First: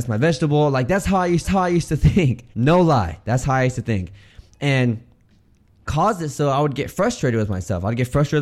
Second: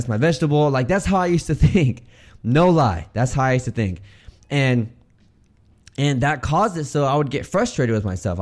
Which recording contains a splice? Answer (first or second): first